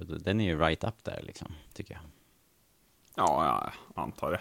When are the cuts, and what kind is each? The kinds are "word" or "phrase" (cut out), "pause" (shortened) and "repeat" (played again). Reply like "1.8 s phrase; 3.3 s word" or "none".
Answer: 1.7 s pause